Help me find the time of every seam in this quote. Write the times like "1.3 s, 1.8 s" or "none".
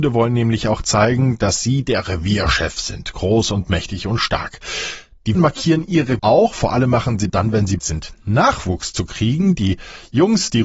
5.3 s, 6.2 s, 7.3 s, 7.8 s